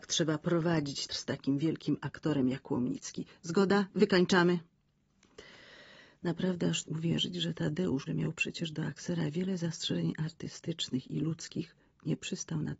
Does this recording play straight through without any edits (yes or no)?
no